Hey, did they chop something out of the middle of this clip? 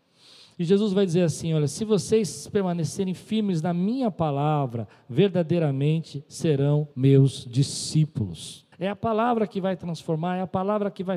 yes; 2 cuts; at 6.9 s, 8.7 s

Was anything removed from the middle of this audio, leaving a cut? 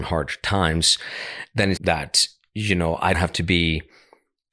yes; 2 cuts; at 1.8 s, 3.1 s

